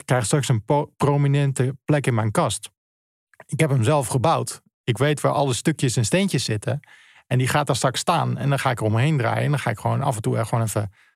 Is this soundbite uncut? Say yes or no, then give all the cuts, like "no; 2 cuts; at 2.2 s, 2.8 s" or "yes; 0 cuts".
yes; 0 cuts